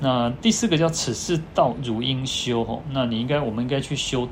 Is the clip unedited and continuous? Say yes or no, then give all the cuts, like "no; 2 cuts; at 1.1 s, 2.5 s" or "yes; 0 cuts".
yes; 0 cuts